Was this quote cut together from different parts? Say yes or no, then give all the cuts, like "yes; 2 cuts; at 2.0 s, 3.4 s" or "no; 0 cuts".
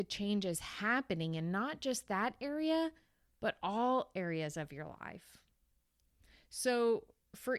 no; 0 cuts